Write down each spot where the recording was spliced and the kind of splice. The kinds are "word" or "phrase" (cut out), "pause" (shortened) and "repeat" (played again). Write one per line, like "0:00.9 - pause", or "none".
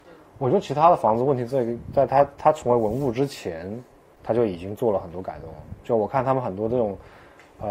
none